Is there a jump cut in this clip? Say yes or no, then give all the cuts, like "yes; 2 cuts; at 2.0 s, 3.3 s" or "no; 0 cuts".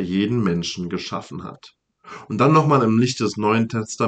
no; 0 cuts